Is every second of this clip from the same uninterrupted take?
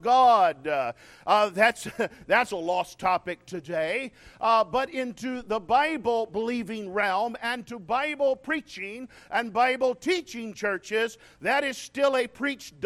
yes; 0 cuts

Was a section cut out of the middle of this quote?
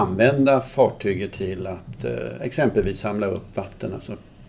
no; 0 cuts

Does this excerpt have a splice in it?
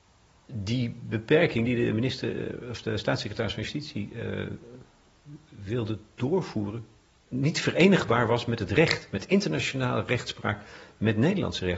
no; 0 cuts

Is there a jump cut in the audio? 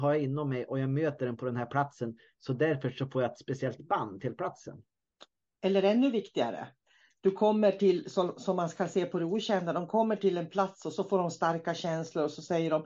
no; 0 cuts

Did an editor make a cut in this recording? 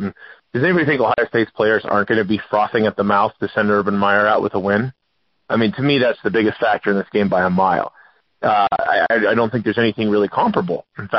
no; 0 cuts

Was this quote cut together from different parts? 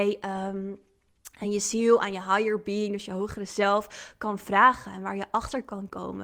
no; 0 cuts

